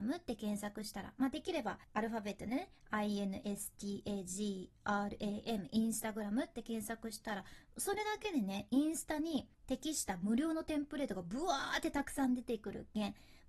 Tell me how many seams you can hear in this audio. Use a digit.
2